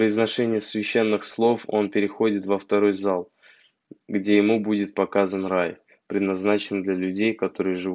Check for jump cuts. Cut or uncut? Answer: uncut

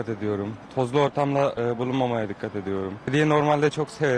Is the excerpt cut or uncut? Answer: uncut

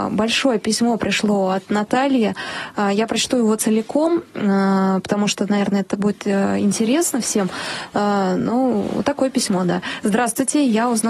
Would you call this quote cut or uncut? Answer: uncut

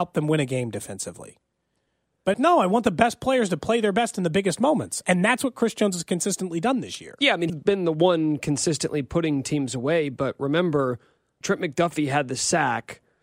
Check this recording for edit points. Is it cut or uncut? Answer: cut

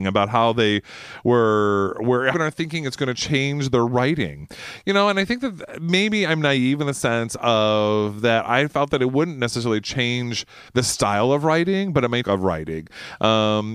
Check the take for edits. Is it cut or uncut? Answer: cut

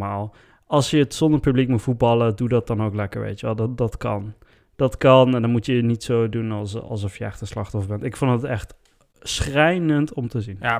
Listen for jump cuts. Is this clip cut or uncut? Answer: uncut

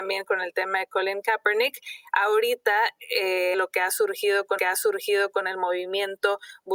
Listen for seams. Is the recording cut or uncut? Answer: cut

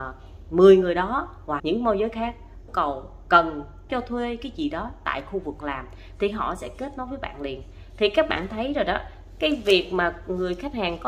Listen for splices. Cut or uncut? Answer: cut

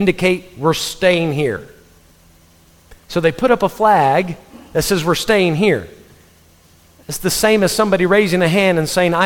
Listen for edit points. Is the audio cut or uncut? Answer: uncut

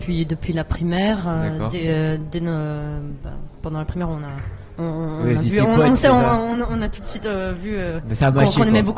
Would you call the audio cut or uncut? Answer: uncut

